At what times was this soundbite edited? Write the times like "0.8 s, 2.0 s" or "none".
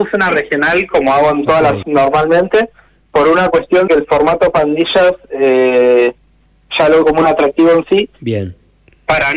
1.8 s, 3.9 s, 7.0 s